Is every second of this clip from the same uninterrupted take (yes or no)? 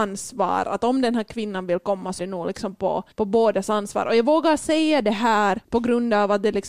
no